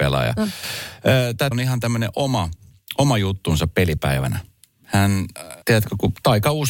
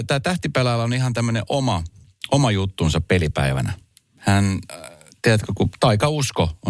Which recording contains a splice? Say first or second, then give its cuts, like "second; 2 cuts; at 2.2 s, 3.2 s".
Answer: first; 2 cuts; at 1.5 s, 5.6 s